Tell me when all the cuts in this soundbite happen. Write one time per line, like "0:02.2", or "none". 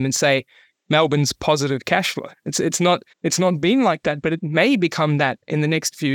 0:03.1